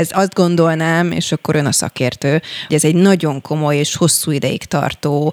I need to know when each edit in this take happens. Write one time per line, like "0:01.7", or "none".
0:02.7